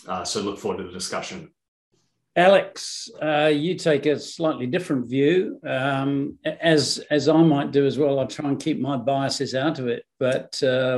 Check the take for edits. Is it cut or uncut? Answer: uncut